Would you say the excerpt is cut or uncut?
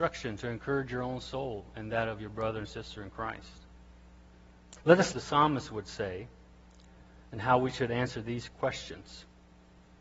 cut